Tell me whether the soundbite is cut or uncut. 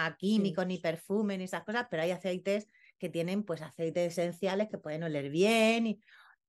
uncut